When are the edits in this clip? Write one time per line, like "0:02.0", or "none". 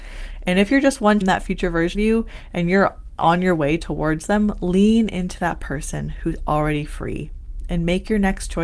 0:01.2
0:01.9